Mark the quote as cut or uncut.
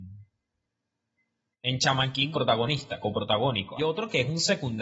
cut